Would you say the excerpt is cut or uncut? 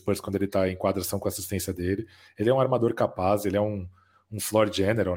uncut